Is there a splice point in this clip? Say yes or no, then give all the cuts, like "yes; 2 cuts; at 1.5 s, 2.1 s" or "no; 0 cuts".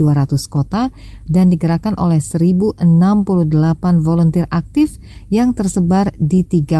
no; 0 cuts